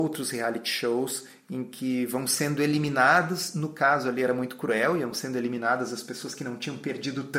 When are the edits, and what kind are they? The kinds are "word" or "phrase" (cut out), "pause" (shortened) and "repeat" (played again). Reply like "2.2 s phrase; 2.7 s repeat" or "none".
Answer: none